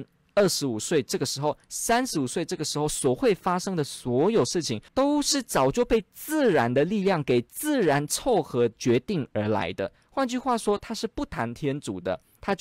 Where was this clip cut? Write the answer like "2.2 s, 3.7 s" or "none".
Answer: 4.9 s